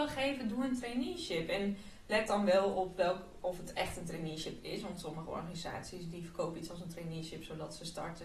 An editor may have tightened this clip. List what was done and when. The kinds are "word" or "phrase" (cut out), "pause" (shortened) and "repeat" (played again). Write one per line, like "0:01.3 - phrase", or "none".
none